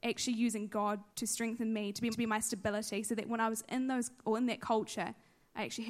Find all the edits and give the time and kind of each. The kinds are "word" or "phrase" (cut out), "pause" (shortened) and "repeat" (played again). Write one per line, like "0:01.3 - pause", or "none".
0:01.1 - pause
0:02.1 - repeat
0:04.2 - word

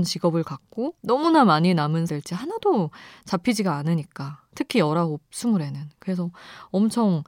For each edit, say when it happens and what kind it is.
0:01.0 - pause
0:02.1 - phrase

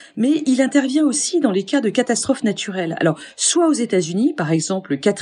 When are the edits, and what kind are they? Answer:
none

